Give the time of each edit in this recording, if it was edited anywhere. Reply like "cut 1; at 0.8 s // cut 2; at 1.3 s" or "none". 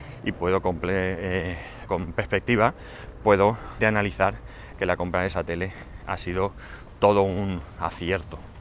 cut 1; at 1.9 s // cut 2; at 3.8 s